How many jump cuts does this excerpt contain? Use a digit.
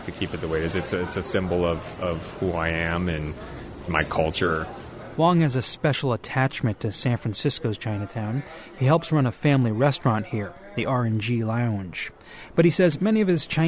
0